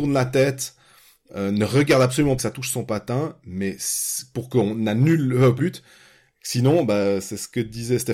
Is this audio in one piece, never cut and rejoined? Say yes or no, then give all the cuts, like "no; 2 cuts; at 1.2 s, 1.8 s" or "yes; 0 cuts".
no; 2 cuts; at 2.4 s, 5.6 s